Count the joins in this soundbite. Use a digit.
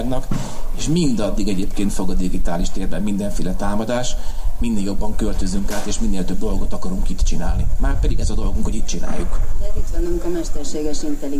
1